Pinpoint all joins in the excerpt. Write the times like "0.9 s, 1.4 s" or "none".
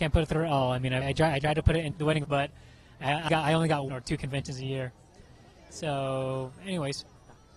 1.0 s, 1.9 s, 2.2 s, 3.3 s, 3.9 s